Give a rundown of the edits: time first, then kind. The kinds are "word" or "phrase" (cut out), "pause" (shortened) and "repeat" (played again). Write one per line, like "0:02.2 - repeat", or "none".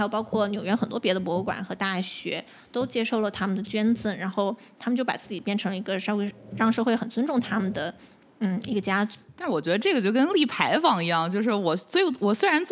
none